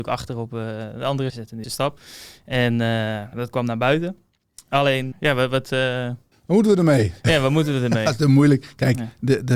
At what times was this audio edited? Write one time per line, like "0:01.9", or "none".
0:01.3
0:01.6
0:03.3
0:05.1
0:06.3